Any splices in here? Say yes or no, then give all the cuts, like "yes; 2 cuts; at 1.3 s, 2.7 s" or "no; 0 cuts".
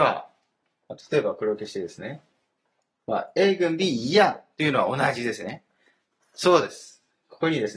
no; 0 cuts